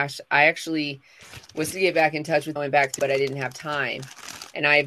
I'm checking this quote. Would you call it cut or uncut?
cut